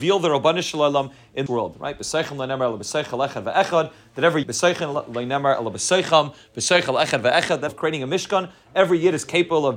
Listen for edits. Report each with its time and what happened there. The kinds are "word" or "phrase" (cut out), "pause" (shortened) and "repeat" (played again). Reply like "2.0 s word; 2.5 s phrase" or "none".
1.5 s word; 4.4 s word; 7.7 s phrase